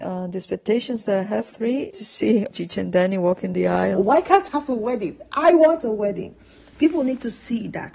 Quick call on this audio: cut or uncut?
cut